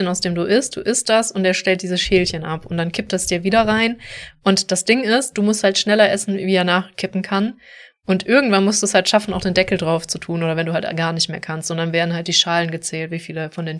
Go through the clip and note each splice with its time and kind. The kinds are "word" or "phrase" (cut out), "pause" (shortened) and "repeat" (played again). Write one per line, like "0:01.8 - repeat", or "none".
none